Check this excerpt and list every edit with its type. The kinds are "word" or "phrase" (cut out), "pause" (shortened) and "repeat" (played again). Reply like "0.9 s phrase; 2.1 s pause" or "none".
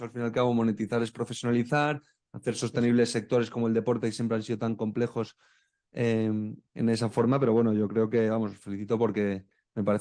none

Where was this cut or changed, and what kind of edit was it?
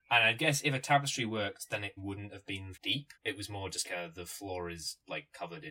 2.0 s word; 2.7 s word; 3.1 s pause; 3.8 s word

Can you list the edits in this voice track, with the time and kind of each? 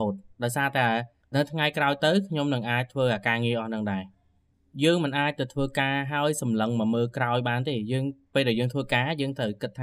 none

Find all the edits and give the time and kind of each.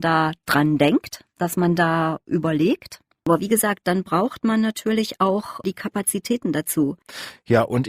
1.3 s pause

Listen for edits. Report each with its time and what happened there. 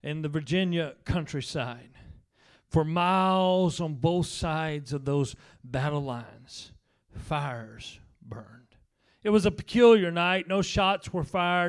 none

